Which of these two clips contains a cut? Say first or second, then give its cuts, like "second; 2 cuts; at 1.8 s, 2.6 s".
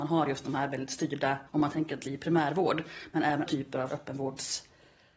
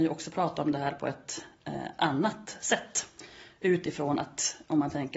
first; 4 cuts; at 1.5 s, 2.0 s, 3.5 s, 3.9 s